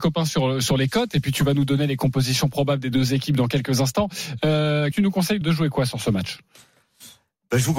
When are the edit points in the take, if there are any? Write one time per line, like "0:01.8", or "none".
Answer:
0:04.9
0:05.4